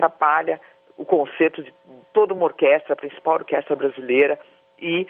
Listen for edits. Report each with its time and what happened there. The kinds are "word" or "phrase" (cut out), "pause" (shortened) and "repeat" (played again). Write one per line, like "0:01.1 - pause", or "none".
none

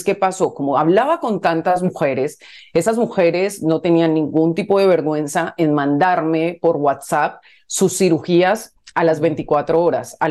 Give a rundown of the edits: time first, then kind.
none

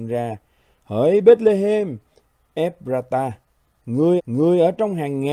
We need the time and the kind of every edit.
0:04.2 - repeat

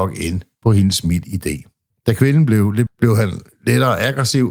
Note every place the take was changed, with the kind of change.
0:01.9 - pause
0:02.9 - word

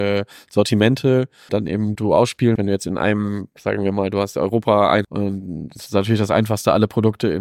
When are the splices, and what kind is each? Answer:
0:01.5 - word
0:01.9 - word
0:02.6 - word
0:05.0 - word

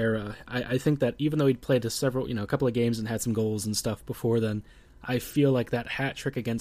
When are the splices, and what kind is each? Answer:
none

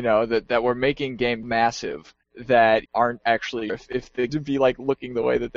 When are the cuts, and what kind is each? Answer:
0:01.4 - word
0:02.9 - phrase
0:03.7 - word
0:04.3 - phrase

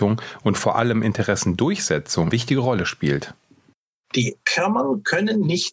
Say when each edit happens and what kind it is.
0:02.3 - word

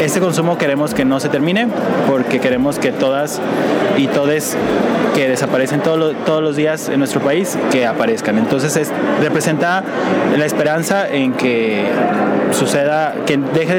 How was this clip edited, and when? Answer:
none

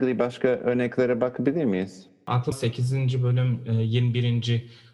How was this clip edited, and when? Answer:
0:02.5 - phrase

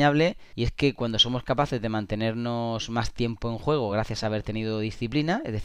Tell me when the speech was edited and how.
none

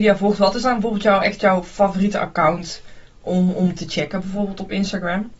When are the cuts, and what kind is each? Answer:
none

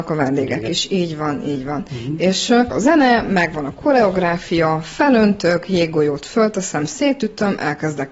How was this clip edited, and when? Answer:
0:02.7 - word

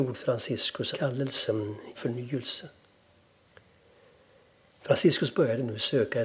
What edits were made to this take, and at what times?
0:00.9 - word
0:01.9 - phrase

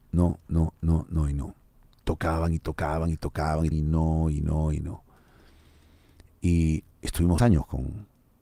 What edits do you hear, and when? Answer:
0:03.7 - word
0:07.4 - word

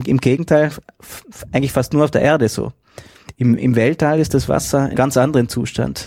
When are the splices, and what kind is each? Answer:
0:05.0 - word

